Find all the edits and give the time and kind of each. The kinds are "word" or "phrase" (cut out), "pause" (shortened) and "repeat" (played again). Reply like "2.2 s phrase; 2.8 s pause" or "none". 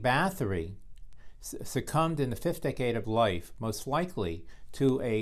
3.0 s word